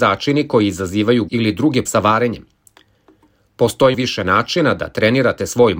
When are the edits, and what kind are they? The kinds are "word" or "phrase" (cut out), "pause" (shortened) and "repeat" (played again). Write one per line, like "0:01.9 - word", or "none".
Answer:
0:01.3 - word
0:01.9 - word
0:03.9 - word